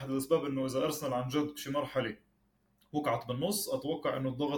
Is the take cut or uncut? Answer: uncut